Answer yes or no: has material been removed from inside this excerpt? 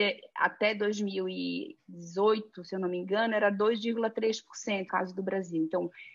yes